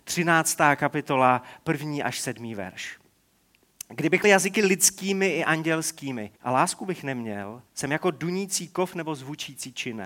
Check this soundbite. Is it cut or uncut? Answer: cut